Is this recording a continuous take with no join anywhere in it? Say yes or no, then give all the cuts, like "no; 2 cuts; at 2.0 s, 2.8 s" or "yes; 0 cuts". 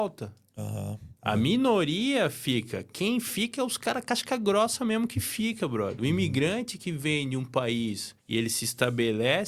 no; 1 cut; at 8.2 s